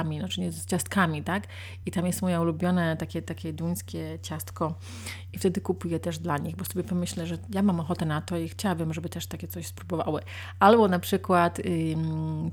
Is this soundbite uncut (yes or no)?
yes